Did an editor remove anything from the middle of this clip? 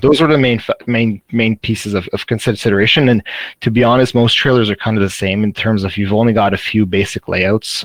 no; 0 cuts

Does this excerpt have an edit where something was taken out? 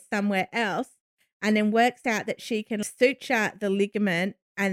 no; 0 cuts

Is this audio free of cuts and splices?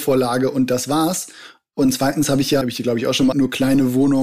no; 2 cuts; at 2.6 s, 3.3 s

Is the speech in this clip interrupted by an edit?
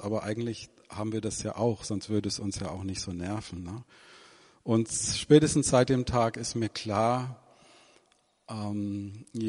no; 0 cuts

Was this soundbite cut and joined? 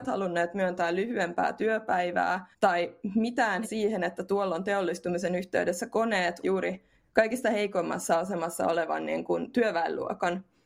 yes; 3 cuts; at 2.5 s, 3.6 s, 6.4 s

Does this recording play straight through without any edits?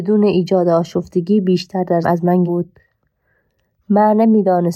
no; 2 cuts; at 2.0 s, 2.4 s

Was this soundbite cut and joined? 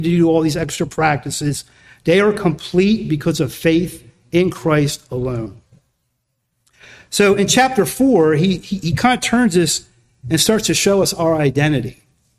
no; 0 cuts

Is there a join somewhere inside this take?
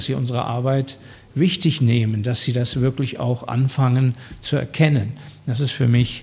no; 0 cuts

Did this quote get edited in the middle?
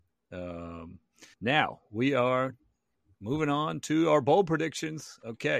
yes; 2 cuts; at 1.3 s, 2.9 s

